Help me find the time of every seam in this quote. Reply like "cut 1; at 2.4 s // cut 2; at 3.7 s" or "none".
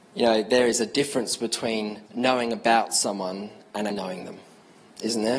cut 1; at 2.1 s // cut 2; at 3.9 s